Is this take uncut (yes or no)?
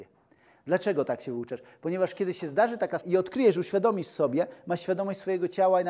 no